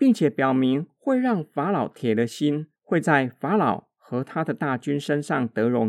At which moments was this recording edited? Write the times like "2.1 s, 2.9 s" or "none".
2.8 s